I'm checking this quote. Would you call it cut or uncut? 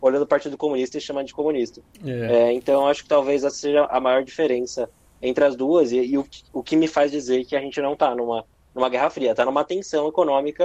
uncut